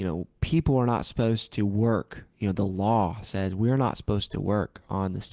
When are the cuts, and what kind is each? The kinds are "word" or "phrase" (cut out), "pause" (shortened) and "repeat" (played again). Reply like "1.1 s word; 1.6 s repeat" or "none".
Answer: none